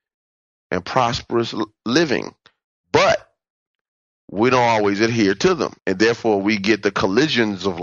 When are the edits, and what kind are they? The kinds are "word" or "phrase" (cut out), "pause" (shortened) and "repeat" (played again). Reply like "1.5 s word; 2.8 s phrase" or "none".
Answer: 5.8 s pause